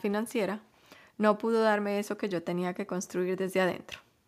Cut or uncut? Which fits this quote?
uncut